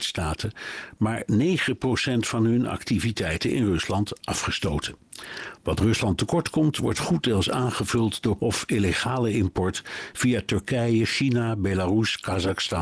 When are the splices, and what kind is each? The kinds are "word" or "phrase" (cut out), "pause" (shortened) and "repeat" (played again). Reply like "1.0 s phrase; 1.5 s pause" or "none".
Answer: 8.4 s word